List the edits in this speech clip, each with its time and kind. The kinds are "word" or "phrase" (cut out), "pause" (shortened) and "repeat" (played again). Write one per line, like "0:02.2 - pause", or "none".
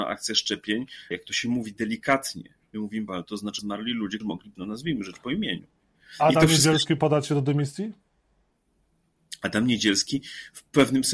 0:01.1 - word
0:03.1 - word
0:03.6 - word
0:04.2 - word
0:04.6 - word
0:07.0 - word